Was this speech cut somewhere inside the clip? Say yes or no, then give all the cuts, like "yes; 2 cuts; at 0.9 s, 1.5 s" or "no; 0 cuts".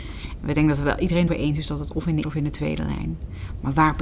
yes; 2 cuts; at 1.3 s, 2.2 s